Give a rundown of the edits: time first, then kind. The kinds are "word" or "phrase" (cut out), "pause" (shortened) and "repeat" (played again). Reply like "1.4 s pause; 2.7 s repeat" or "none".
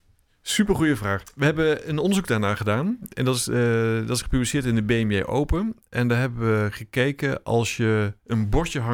none